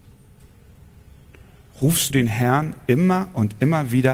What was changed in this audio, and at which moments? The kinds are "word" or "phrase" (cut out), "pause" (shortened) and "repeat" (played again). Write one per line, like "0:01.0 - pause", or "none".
0:02.1 - word